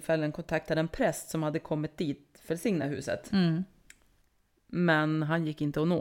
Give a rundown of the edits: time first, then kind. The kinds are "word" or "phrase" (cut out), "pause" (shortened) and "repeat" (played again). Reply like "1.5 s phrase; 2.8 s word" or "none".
2.5 s word